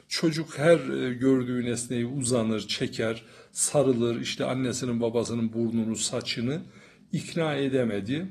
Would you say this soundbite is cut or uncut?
uncut